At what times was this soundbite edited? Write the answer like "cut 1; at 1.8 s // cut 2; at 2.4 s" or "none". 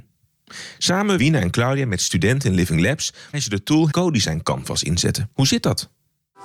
cut 1; at 1.2 s // cut 2; at 3.3 s // cut 3; at 3.9 s // cut 4; at 5.3 s